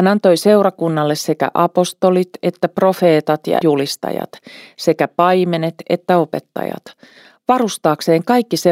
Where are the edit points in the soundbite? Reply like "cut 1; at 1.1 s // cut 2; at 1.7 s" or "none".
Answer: cut 1; at 3.6 s